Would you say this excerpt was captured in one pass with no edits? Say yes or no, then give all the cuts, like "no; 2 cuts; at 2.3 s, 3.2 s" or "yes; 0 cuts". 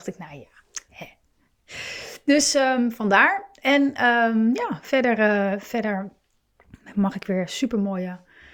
yes; 0 cuts